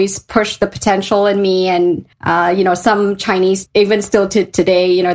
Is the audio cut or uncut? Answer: cut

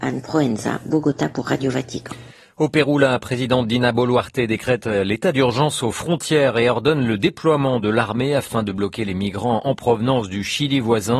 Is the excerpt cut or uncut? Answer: uncut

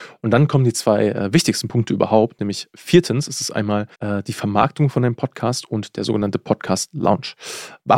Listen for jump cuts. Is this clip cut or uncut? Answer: cut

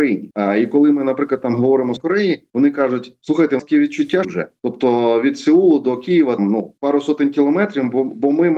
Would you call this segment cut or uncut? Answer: cut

